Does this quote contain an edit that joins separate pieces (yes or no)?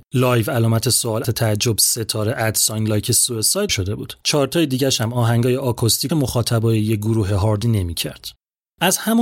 yes